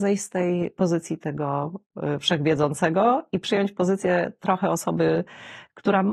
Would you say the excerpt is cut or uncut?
uncut